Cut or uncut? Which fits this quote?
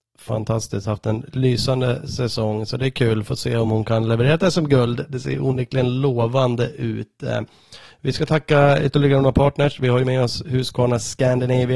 uncut